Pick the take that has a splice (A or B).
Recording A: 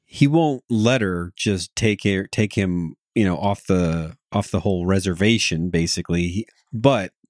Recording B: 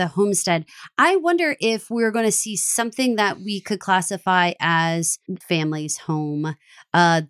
B